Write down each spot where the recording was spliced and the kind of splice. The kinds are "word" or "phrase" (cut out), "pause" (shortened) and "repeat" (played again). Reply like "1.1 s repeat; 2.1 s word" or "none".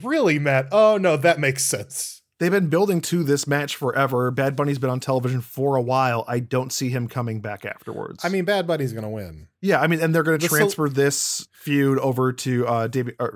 9.6 s pause